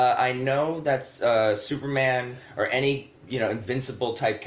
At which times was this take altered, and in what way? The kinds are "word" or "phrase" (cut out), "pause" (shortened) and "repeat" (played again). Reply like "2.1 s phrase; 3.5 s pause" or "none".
3.2 s pause